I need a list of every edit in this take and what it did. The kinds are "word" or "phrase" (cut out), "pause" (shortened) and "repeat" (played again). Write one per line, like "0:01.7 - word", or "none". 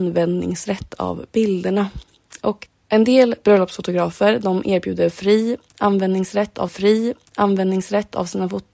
0:06.7 - repeat